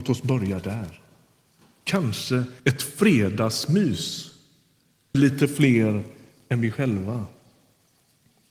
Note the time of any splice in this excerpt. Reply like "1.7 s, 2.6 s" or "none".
2.6 s, 5.1 s